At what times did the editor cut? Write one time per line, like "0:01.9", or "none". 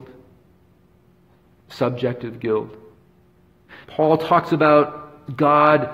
0:03.8